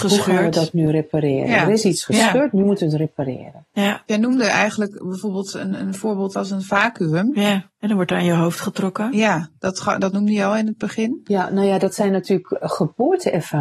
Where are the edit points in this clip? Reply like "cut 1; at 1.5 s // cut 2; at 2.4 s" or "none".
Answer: none